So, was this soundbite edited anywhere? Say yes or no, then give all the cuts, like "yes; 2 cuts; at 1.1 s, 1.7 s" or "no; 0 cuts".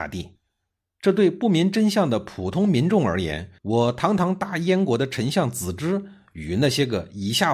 yes; 1 cut; at 3.6 s